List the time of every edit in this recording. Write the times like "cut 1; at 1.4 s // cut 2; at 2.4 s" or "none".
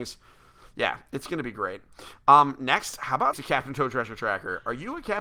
cut 1; at 3.3 s